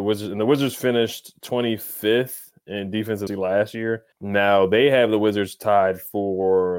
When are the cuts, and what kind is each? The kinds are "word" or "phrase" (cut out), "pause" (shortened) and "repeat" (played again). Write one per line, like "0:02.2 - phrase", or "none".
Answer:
0:03.3 - word
0:04.1 - pause